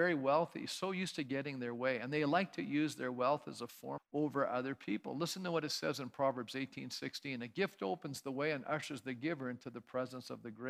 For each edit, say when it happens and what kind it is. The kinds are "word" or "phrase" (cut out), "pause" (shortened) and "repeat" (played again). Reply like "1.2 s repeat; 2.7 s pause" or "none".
4.0 s phrase